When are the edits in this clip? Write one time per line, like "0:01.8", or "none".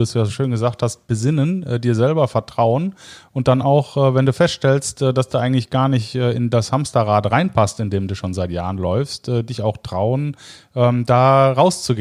none